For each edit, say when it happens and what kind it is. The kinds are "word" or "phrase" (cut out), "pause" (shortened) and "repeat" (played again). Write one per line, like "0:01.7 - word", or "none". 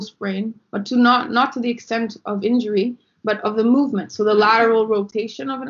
none

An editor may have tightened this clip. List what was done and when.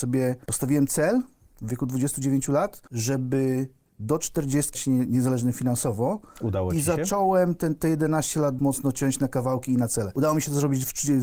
0:04.7 - word
0:08.6 - word

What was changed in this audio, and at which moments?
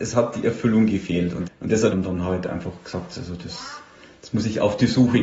0:01.5 - word
0:01.9 - phrase

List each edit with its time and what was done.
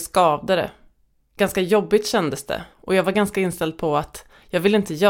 0:02.7 - pause

